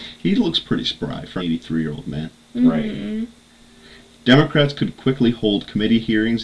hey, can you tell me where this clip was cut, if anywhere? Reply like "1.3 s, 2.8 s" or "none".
1.4 s